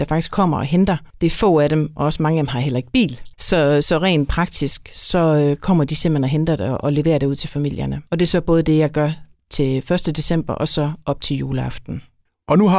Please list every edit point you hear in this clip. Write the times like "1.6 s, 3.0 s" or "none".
1.1 s, 3.3 s, 8.1 s